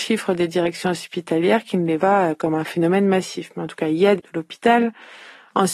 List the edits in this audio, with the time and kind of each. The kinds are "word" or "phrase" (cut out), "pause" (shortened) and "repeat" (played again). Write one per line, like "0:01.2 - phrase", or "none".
0:02.0 - word
0:04.2 - phrase